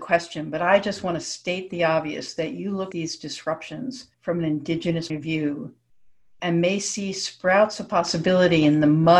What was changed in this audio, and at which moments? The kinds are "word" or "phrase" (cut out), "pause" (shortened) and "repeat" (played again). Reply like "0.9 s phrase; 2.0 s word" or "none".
2.9 s word; 4.1 s pause; 5.1 s word